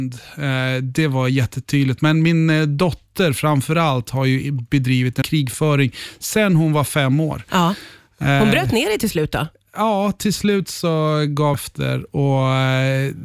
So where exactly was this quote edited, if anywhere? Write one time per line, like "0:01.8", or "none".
0:05.2
0:11.5